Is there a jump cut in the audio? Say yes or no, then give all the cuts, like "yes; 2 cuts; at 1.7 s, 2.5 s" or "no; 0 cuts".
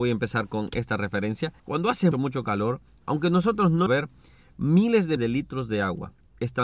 yes; 4 cuts; at 1.6 s, 2.1 s, 3.9 s, 5.2 s